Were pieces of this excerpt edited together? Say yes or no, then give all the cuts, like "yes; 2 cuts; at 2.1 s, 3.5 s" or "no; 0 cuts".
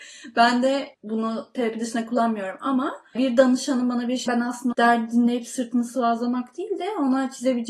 yes; 4 cuts; at 0.9 s, 3.2 s, 4.3 s, 4.7 s